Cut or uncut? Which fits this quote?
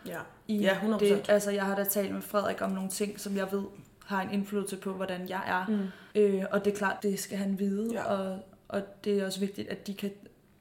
cut